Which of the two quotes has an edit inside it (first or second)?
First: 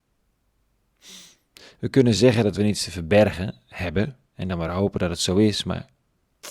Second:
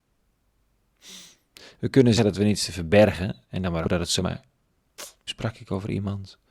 second